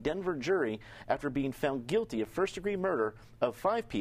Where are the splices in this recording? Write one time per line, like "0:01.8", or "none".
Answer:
none